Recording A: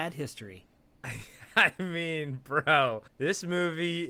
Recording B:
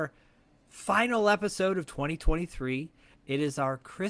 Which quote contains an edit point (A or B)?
A